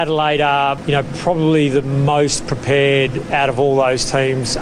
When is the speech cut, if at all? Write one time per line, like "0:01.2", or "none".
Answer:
none